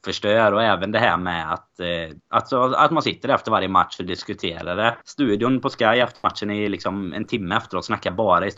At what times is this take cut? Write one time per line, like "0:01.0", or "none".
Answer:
0:02.2
0:05.0